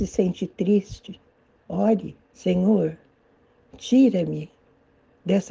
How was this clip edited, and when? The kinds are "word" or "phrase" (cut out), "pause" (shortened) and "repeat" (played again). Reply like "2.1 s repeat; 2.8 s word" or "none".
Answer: 2.2 s pause